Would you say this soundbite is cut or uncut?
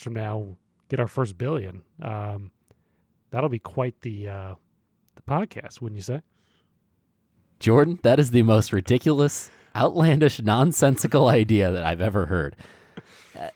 uncut